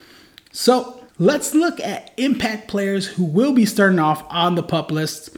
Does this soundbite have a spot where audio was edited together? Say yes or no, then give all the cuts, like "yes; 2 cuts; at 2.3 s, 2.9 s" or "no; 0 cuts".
yes; 1 cut; at 1.1 s